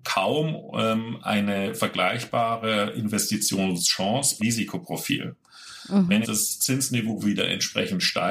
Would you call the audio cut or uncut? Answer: cut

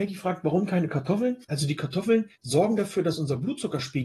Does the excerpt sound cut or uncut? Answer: cut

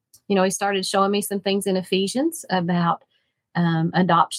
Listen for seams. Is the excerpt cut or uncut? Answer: uncut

